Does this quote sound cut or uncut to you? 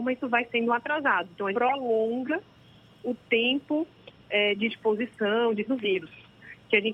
cut